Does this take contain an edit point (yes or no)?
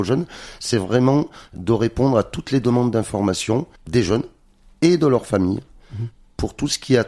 yes